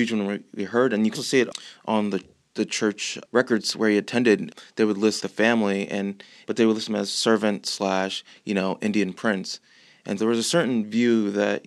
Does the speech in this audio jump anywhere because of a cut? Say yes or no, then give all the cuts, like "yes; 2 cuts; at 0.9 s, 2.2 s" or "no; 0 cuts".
yes; 3 cuts; at 1.1 s, 5.2 s, 10.2 s